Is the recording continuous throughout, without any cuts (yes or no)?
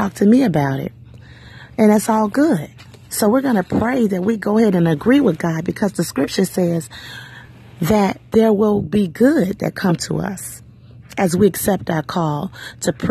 yes